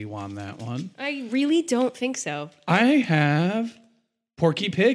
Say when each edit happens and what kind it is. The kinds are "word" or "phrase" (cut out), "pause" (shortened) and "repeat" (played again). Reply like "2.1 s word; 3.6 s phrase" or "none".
none